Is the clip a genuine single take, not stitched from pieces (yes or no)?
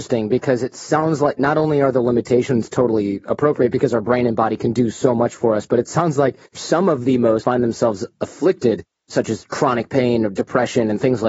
no